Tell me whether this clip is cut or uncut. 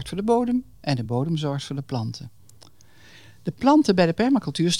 uncut